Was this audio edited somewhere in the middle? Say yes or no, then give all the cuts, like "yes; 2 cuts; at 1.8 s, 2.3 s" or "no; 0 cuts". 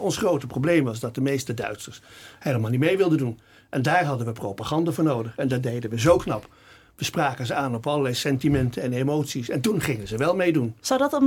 no; 0 cuts